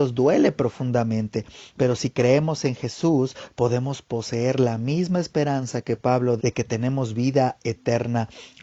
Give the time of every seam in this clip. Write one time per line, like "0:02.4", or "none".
0:06.4